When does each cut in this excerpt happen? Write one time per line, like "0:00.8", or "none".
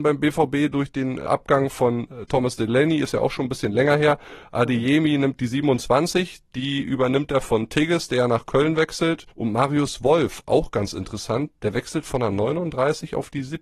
none